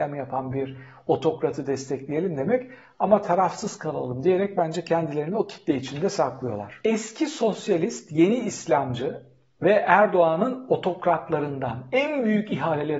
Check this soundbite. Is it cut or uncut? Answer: uncut